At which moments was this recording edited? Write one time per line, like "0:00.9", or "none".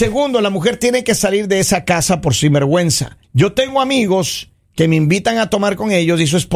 0:03.2